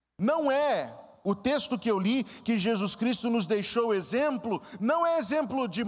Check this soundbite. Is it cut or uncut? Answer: uncut